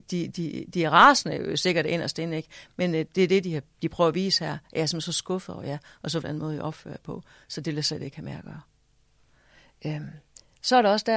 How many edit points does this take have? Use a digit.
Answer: 1